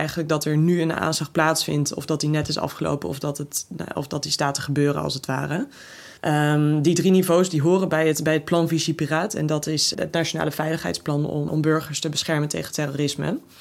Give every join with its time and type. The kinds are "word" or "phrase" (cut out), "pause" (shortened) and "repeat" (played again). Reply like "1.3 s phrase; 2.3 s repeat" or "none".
6.2 s pause; 9.9 s word; 11.5 s word